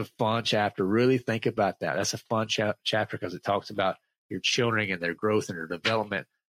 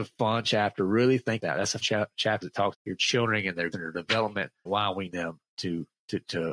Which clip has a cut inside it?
second; 7 cuts; at 1.4 s, 1.8 s, 2.4 s, 2.7 s, 3.7 s, 4.7 s, 5.1 s

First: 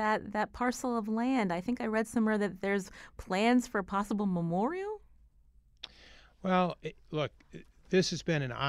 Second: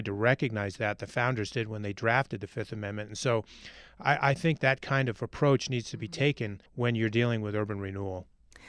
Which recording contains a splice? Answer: second; 2 cuts; at 4.6 s, 6.7 s

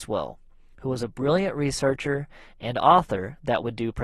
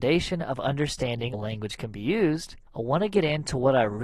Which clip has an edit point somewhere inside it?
second; 2 cuts; at 1.3 s, 2.7 s

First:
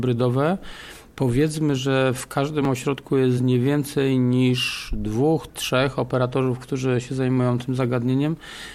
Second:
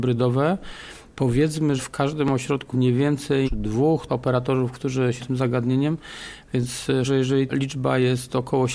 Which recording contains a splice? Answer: second; 7 cuts; at 1.8 s, 2.7 s, 3.4 s, 4.1 s, 5.2 s, 7.0 s, 7.5 s

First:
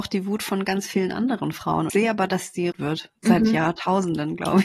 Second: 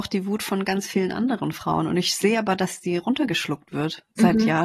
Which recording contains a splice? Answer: first; 2 cuts; at 1.9 s, 2.7 s

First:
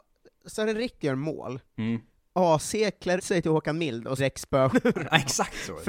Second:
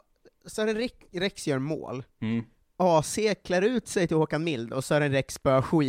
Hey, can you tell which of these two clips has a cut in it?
first; 4 cuts; at 1.0 s, 3.2 s, 4.2 s, 4.7 s

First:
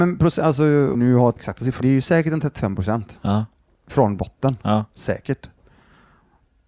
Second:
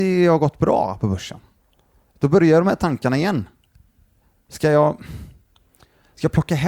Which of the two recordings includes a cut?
first; 3 cuts; at 0.9 s, 1.4 s, 1.8 s

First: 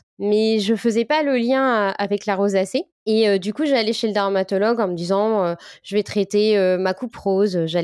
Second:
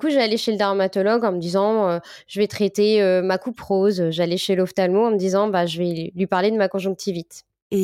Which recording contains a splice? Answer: first; 1 cut; at 2.9 s

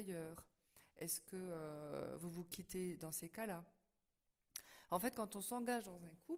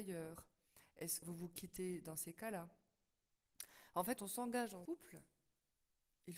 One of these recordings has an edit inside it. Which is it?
second; 3 cuts; at 1.2 s, 4.2 s, 4.9 s

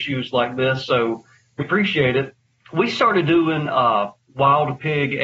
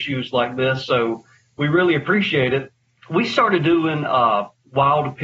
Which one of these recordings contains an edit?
first; 1 cut; at 1.6 s

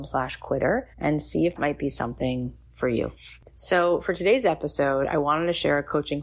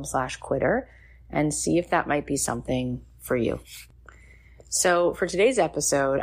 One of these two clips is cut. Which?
first; 3 cuts; at 0.9 s, 1.6 s, 3.5 s

